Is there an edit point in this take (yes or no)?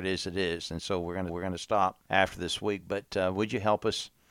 yes